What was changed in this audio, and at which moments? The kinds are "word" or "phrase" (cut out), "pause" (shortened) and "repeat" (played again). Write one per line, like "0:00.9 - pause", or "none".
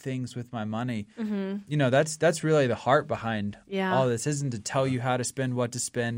none